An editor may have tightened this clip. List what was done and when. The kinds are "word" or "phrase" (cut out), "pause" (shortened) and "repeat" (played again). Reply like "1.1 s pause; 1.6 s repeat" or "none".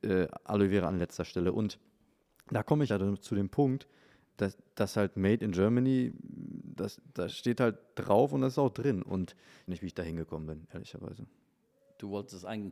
2.9 s word; 4.3 s word; 9.7 s phrase

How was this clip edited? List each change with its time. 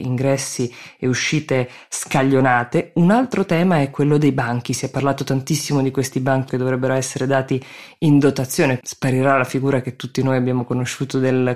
6.5 s word; 8.8 s word

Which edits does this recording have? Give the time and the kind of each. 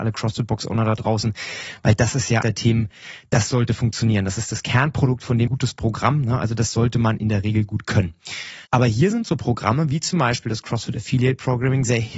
2.4 s word; 5.5 s phrase; 8.7 s pause

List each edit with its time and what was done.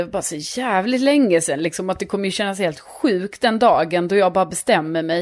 none

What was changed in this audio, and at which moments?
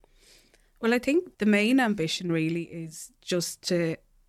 1.3 s pause

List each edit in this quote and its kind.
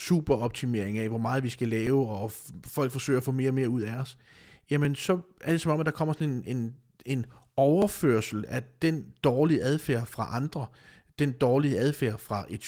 none

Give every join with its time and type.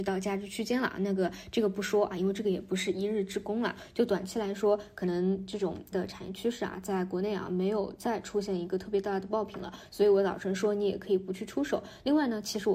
5.9 s word

